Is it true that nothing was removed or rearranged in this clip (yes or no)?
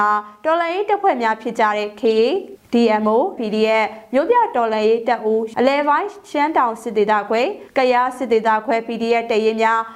no